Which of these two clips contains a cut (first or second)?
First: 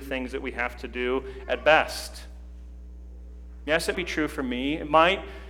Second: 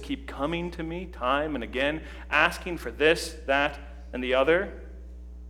first